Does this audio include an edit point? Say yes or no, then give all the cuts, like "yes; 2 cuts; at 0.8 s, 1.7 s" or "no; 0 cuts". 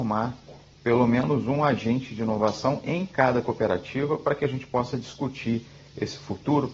no; 0 cuts